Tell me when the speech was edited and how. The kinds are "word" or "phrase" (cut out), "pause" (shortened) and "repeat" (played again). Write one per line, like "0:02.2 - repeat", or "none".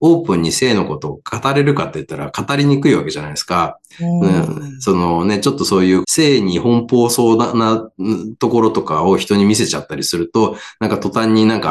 0:06.0 - phrase

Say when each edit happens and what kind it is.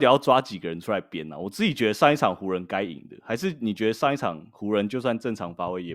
none

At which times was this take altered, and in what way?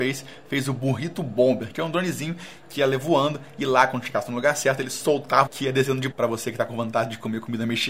0:05.5 - phrase
0:06.1 - word

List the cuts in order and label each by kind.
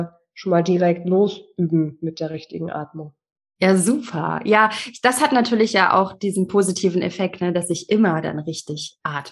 none

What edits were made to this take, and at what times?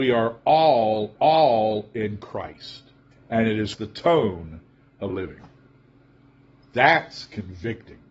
0:01.2 - repeat
0:03.1 - pause
0:03.8 - phrase
0:05.1 - word

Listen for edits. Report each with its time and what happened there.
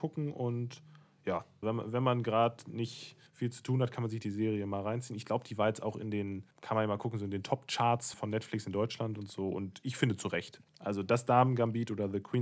0:01.6 - word
0:03.3 - pause
0:06.5 - pause
0:08.1 - word
0:10.7 - pause

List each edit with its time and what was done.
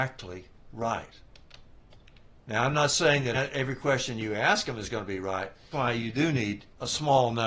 0:03.3 - word
0:05.7 - word

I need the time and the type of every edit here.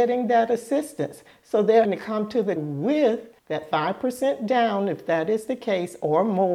0:01.8 - word
0:02.6 - word
0:03.4 - pause

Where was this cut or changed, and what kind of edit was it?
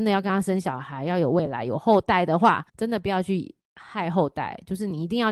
0:02.7 - pause

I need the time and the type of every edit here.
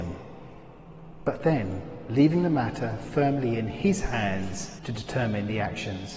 0:04.8 - pause

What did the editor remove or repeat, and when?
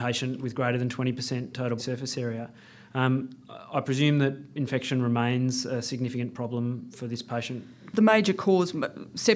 0:01.8 - word
0:07.9 - word

